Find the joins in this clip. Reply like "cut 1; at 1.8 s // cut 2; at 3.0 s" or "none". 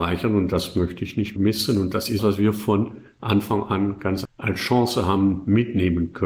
cut 1; at 1.4 s // cut 2; at 2.2 s // cut 3; at 4.2 s